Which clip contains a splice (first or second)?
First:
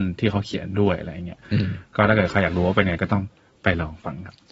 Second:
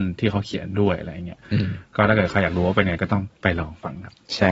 second